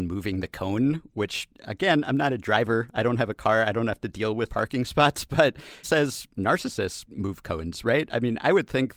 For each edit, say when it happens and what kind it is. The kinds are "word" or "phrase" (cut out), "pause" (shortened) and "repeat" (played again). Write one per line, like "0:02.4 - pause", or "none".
0:04.5 - word
0:05.8 - word